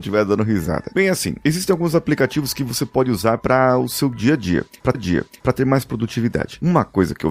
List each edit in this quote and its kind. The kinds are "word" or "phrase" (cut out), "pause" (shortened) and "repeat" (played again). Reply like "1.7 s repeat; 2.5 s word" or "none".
4.9 s repeat